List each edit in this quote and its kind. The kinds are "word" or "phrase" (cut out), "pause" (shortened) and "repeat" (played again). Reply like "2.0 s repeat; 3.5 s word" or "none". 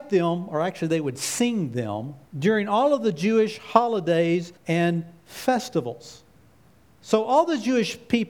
2.3 s pause; 4.6 s pause; 6.6 s pause